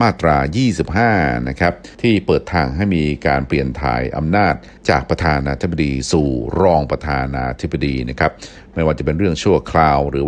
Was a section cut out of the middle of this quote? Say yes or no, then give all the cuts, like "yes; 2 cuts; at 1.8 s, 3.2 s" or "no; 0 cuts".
yes; 2 cuts; at 1.9 s, 4.8 s